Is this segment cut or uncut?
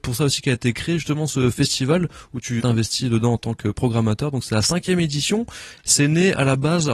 cut